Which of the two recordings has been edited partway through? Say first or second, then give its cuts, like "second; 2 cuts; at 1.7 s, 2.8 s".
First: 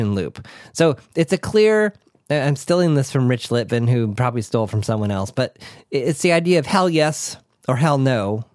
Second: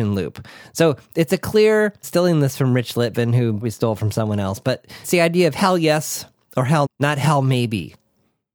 second; 4 cuts; at 2.0 s, 3.6 s, 5.0 s, 6.8 s